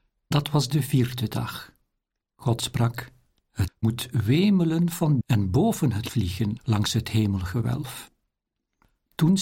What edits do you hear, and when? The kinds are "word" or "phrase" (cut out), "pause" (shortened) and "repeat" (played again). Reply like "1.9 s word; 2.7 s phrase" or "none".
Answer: 3.7 s word; 5.2 s word; 6.1 s phrase